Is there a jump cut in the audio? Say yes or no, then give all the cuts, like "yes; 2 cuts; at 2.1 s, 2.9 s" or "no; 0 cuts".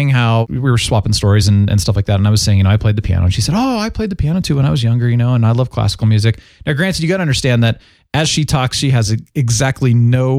no; 0 cuts